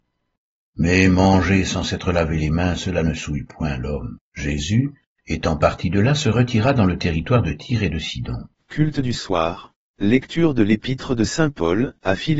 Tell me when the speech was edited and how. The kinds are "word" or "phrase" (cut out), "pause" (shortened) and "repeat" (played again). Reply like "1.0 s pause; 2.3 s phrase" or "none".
4.3 s pause; 8.5 s pause; 9.9 s pause